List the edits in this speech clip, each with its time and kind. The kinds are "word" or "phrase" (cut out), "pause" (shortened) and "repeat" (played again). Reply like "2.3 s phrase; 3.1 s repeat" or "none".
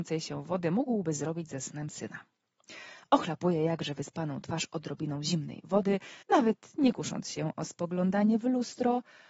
6.2 s pause